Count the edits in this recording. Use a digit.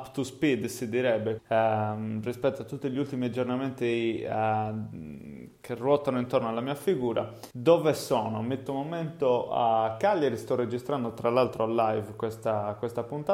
3